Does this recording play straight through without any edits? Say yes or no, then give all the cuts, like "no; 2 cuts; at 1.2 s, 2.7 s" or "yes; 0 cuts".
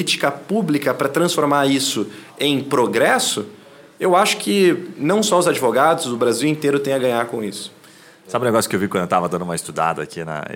yes; 0 cuts